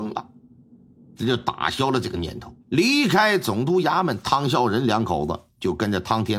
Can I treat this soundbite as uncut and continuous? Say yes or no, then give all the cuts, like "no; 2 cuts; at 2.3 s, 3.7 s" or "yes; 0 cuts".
no; 1 cut; at 2.6 s